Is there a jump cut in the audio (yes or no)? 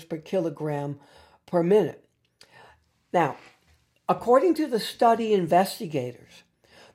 no